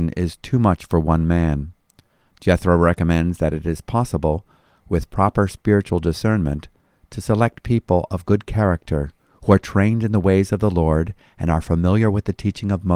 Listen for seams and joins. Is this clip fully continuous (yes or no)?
yes